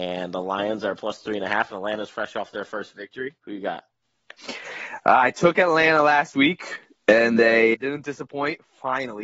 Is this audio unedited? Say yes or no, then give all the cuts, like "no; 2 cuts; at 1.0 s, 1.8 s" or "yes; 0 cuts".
no; 3 cuts; at 3.4 s, 4.4 s, 7.7 s